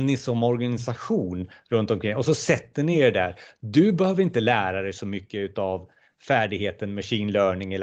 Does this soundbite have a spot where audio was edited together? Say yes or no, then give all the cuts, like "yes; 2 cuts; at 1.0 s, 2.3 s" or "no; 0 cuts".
no; 0 cuts